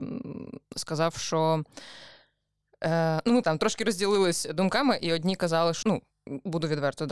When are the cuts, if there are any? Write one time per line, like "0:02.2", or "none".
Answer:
0:03.4
0:05.8